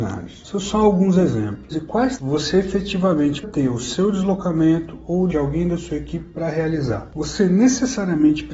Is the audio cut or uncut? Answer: cut